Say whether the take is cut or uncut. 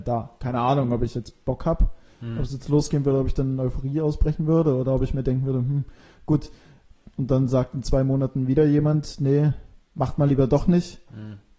uncut